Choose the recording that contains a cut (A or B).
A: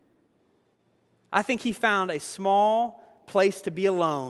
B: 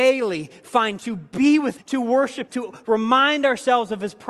B